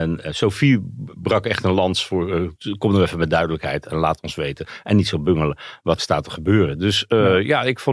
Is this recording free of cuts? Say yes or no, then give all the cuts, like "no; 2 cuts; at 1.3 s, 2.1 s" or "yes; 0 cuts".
no; 1 cut; at 6.0 s